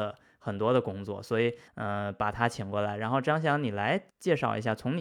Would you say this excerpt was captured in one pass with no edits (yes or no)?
no